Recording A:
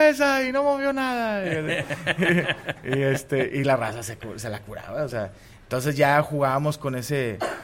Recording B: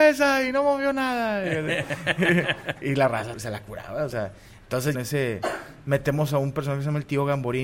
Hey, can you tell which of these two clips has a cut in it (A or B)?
B